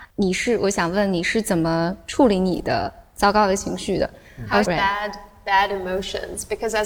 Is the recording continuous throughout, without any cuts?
no; 1 cut; at 4.6 s

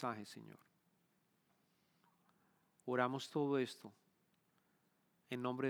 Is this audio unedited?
yes; 0 cuts

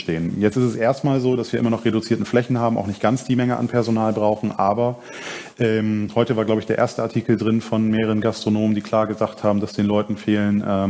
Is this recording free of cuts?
yes; 0 cuts

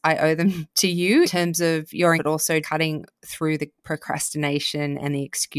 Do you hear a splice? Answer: yes; 3 cuts; at 1.2 s, 2.2 s, 2.6 s

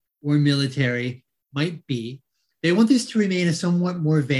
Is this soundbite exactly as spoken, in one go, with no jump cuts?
yes; 0 cuts

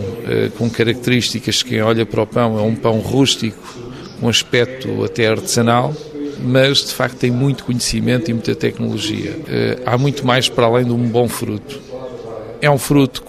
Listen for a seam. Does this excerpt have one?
no; 0 cuts

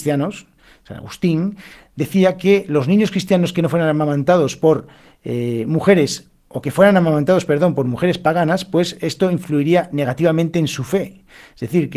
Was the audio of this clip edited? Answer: no; 0 cuts

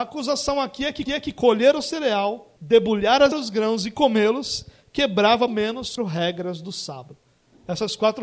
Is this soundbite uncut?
no; 5 cuts; at 1.1 s, 2.6 s, 3.3 s, 5.5 s, 6.0 s

